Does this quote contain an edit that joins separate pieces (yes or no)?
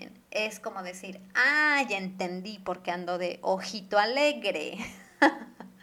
no